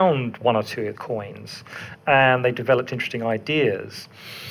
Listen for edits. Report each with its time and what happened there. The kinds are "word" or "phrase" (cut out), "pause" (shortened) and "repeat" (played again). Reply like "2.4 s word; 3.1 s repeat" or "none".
0.9 s word